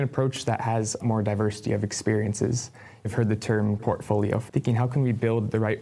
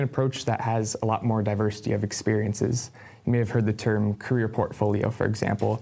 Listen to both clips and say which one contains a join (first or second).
first